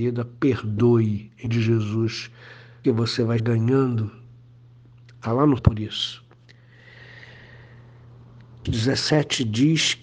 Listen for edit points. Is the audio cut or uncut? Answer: cut